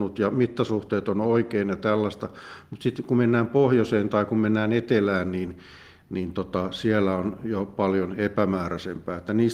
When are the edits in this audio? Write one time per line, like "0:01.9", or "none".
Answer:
none